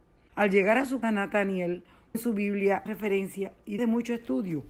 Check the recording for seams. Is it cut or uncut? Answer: cut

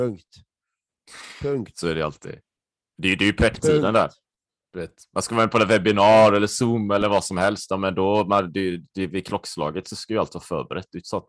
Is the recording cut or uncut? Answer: uncut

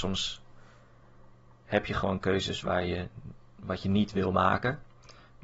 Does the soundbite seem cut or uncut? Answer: uncut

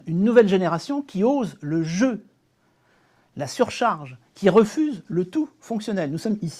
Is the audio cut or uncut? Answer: uncut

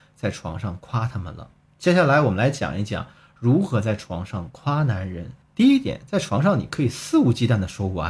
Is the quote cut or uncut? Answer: cut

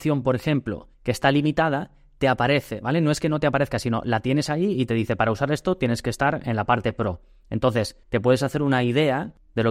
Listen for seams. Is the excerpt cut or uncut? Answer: cut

